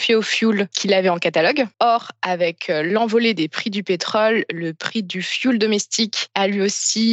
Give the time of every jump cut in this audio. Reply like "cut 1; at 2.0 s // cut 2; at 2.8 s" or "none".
cut 1; at 1.7 s